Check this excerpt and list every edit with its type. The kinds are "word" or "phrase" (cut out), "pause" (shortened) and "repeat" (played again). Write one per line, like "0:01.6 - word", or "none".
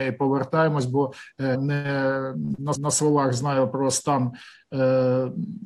0:01.5 - word
0:02.7 - repeat